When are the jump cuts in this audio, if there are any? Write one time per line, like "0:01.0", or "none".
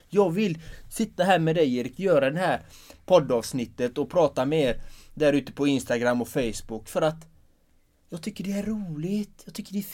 none